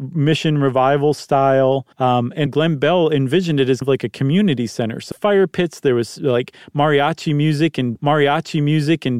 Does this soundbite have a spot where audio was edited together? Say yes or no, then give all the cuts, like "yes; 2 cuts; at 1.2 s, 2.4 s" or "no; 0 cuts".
yes; 5 cuts; at 1.9 s, 2.5 s, 3.8 s, 5.1 s, 8.0 s